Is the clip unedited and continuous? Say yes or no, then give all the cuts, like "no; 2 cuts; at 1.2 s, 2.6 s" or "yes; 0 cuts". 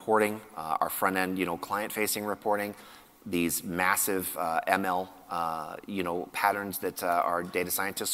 yes; 0 cuts